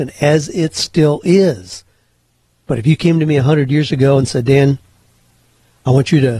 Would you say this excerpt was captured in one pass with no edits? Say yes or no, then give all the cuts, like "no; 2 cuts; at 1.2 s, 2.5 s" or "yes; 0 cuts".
yes; 0 cuts